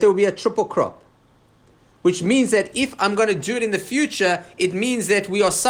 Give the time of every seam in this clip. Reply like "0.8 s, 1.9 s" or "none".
none

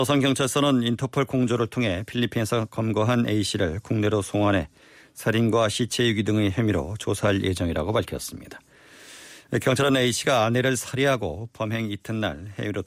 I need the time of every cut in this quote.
none

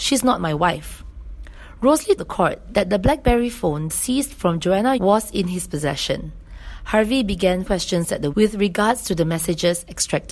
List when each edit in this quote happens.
2.2 s, 3.9 s, 5.0 s, 7.7 s, 8.3 s

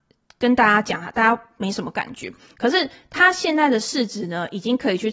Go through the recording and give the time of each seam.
none

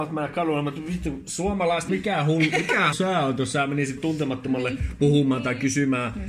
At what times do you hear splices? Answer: 1.9 s, 2.9 s, 4.0 s

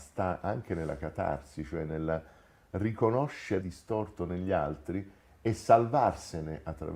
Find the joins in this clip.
3.6 s

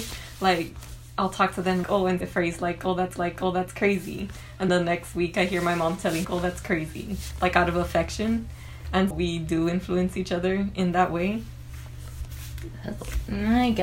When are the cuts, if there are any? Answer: 1.8 s, 2.2 s, 3.2 s, 4.7 s, 6.2 s, 9.1 s

